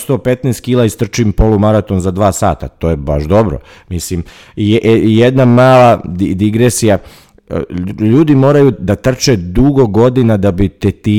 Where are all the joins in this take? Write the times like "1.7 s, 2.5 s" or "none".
8.7 s